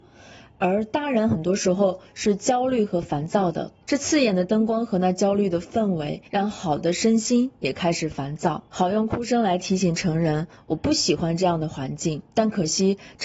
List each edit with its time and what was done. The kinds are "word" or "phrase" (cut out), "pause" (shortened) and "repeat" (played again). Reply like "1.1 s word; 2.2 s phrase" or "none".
3.8 s pause; 6.2 s pause; 8.7 s pause; 12.3 s pause